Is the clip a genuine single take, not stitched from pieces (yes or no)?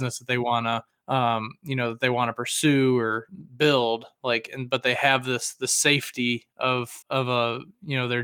no